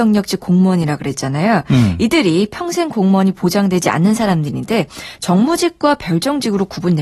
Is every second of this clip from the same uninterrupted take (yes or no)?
yes